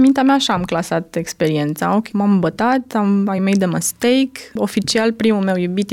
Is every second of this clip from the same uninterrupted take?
yes; 0 cuts

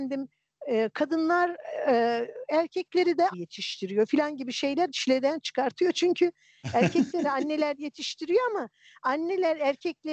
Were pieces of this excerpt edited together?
yes; 2 cuts; at 3.3 s, 4.9 s

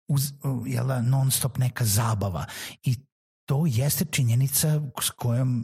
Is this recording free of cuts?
yes; 0 cuts

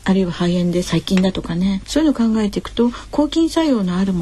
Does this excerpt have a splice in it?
yes; 1 cut; at 1.8 s

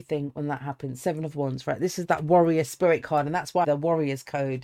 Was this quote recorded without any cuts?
no; 1 cut; at 3.6 s

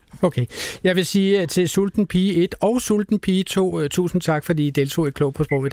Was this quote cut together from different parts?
no; 0 cuts

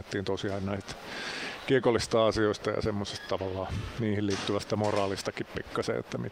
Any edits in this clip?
no; 0 cuts

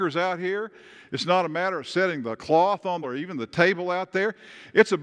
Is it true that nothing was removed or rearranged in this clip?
no; 1 cut; at 3.0 s

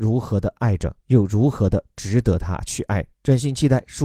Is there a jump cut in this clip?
yes; 2 cuts; at 1.0 s, 3.1 s

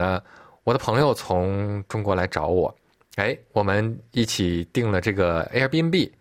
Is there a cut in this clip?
no; 0 cuts

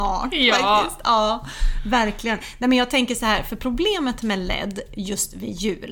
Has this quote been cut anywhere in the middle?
no; 0 cuts

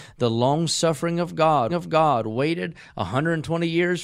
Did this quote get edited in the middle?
yes; 1 cut; at 1.7 s

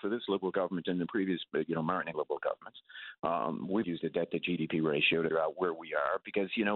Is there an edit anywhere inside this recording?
yes; 3 cuts; at 2.1 s, 3.8 s, 5.3 s

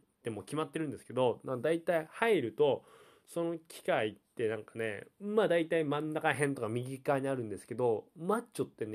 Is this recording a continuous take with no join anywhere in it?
yes; 0 cuts

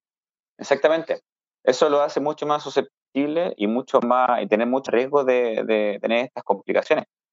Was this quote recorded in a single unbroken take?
no; 2 cuts; at 3.6 s, 4.9 s

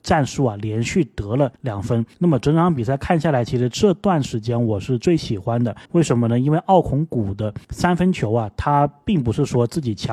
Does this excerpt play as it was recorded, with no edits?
no; 4 cuts; at 1.6 s, 2.1 s, 5.9 s, 7.6 s

